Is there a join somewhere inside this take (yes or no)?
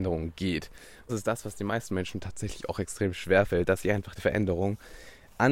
yes